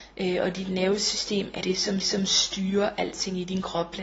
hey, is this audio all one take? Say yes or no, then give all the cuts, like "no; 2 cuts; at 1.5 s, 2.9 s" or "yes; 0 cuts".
no; 2 cuts; at 1.6 s, 2.0 s